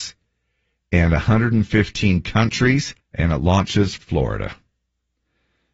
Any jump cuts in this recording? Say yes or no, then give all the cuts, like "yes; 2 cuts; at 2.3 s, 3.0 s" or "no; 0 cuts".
yes; 2 cuts; at 3.0 s, 4.0 s